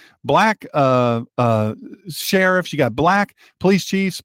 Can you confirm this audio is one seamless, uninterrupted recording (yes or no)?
yes